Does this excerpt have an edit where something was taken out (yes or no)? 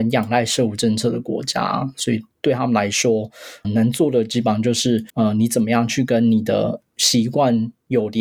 yes